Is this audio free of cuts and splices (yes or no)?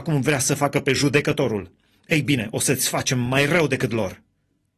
yes